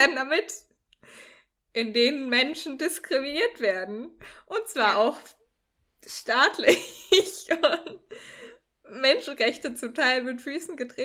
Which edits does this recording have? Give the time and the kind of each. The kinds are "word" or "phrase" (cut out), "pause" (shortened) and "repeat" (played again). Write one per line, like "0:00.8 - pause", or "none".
none